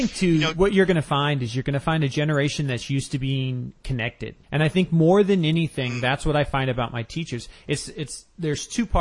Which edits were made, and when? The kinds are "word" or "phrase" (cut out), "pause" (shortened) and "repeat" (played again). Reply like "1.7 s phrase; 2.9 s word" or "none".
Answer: 4.4 s pause